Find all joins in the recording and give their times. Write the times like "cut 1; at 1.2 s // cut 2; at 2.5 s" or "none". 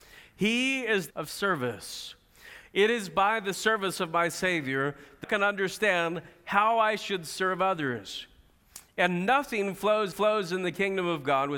cut 1; at 1.1 s // cut 2; at 3.5 s // cut 3; at 5.2 s // cut 4; at 10.1 s